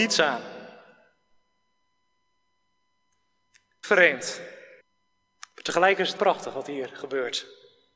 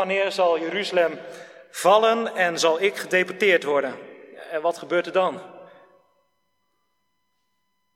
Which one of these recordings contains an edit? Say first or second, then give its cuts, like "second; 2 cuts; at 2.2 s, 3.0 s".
first; 3 cuts; at 3.8 s, 4.8 s, 6.2 s